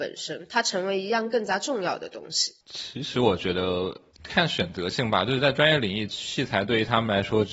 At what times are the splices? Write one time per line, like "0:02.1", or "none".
none